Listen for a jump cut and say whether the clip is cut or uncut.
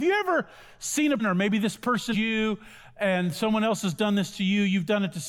cut